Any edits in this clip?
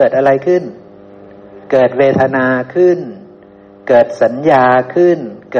yes; 1 cut; at 1.6 s

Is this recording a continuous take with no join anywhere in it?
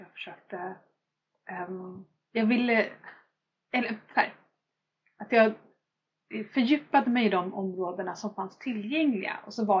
yes; 0 cuts

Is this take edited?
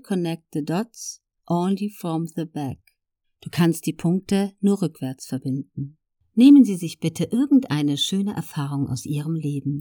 no; 0 cuts

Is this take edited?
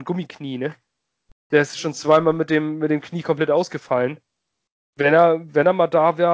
no; 0 cuts

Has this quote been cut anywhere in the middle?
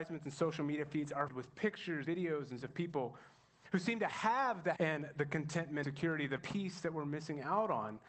yes; 6 cuts; at 1.3 s, 2.0 s, 2.6 s, 4.8 s, 5.8 s, 6.4 s

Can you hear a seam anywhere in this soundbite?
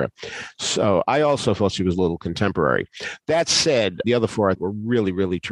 yes; 2 cuts; at 4.0 s, 4.6 s

